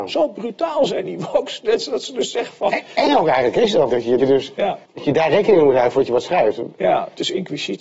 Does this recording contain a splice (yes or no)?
yes